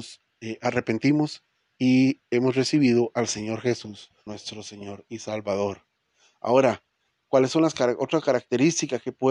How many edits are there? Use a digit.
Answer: 2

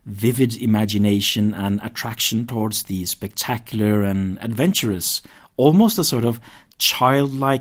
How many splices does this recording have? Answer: 0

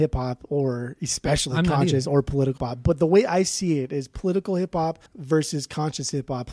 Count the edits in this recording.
2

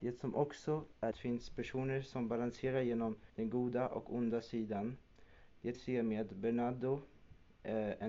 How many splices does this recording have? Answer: 3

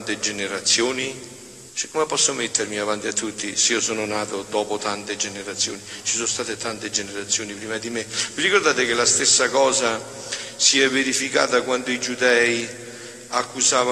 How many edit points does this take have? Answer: 1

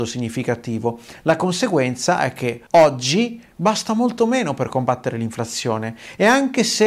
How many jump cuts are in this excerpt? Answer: 1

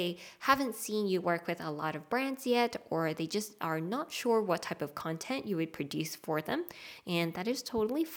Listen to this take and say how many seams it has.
0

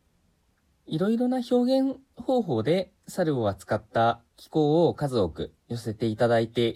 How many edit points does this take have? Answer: 2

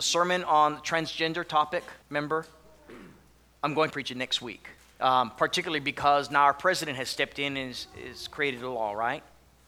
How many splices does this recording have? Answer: 3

